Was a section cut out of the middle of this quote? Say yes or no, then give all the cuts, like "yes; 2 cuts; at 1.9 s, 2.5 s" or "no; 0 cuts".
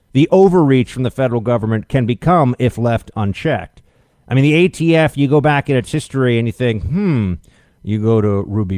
no; 0 cuts